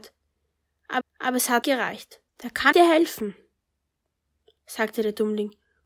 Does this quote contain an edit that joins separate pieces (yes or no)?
yes